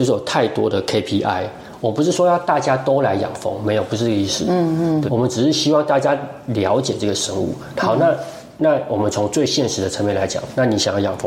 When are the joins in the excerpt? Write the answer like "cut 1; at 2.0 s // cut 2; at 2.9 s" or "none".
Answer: cut 1; at 5.1 s